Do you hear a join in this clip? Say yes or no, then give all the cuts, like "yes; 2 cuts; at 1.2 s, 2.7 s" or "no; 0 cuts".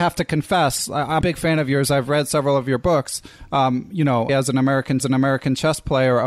yes; 3 cuts; at 1.2 s, 4.3 s, 5.0 s